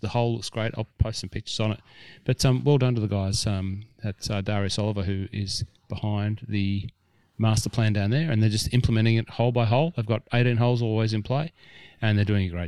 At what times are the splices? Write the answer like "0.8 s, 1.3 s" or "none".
none